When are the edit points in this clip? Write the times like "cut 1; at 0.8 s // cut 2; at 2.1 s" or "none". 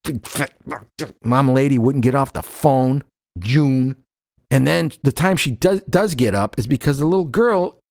cut 1; at 3.4 s // cut 2; at 4.3 s